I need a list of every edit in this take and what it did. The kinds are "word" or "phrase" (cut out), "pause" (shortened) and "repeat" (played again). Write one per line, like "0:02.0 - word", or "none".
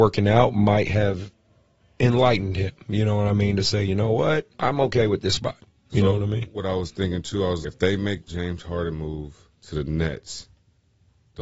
0:04.5 - pause
0:07.6 - word
0:08.3 - word
0:09.5 - pause